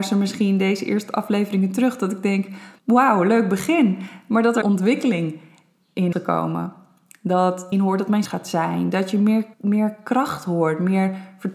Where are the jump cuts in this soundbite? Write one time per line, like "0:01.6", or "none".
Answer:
0:02.8
0:04.6
0:06.1
0:07.7
0:08.2
0:09.5